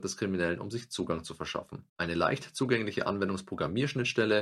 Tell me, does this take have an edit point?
yes; 1 cut; at 1.9 s

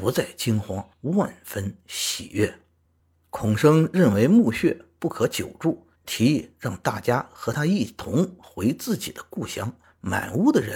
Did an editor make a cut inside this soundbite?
yes; 4 cuts; at 0.9 s, 2.8 s, 6.0 s, 9.8 s

